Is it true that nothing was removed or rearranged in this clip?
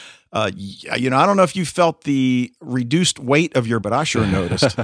no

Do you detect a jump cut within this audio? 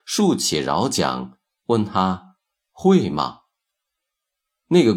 no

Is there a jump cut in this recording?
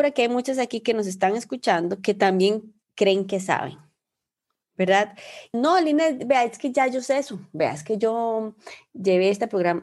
yes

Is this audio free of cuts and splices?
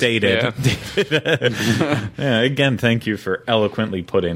yes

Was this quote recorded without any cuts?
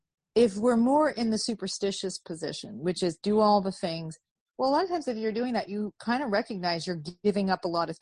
yes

